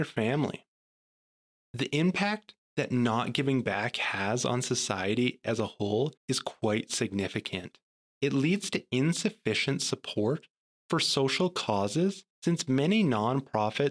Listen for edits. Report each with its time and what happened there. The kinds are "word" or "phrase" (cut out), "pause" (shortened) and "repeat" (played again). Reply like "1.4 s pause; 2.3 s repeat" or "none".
2.7 s pause; 6.2 s pause; 12.3 s pause